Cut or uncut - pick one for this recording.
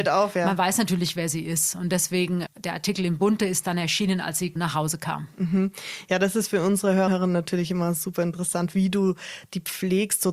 cut